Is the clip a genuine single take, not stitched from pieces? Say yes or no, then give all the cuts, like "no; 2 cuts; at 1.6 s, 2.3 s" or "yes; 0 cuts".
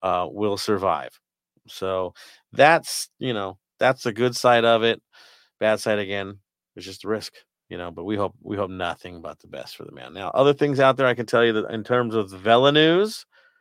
yes; 0 cuts